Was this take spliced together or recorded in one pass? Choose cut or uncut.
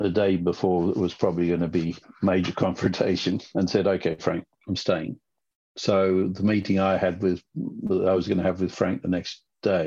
uncut